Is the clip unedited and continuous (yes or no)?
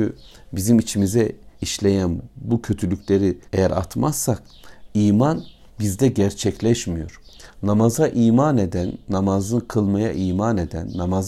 no